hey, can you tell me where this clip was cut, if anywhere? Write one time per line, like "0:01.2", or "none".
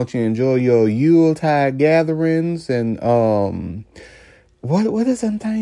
none